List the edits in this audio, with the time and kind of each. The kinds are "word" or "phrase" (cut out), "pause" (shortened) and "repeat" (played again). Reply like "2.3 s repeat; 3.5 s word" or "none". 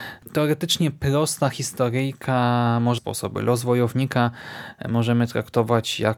3.0 s phrase

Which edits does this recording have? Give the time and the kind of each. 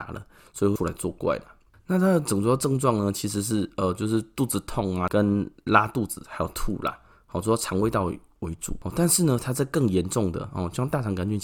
none

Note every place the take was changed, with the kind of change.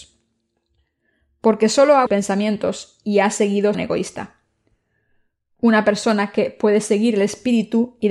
2.1 s phrase; 3.7 s phrase

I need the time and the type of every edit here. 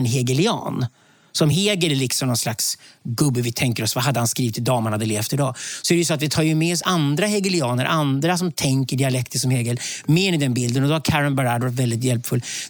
none

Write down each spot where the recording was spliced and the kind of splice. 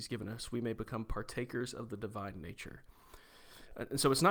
none

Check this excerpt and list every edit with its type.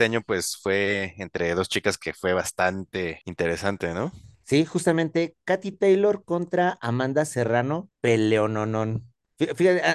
none

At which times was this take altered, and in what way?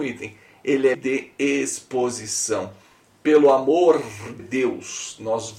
0.9 s word; 4.4 s word

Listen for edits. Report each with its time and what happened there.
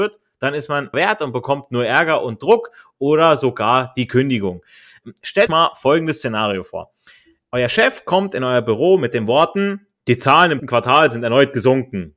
0.9 s word; 5.5 s word; 10.6 s word

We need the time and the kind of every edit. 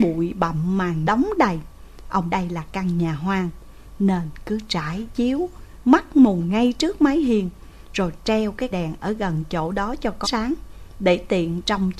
1.0 s word; 2.3 s word; 8.7 s word; 10.2 s word

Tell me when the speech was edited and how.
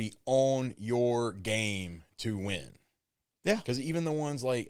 none

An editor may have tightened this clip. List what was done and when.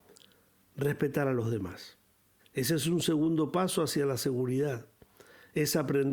2.4 s pause

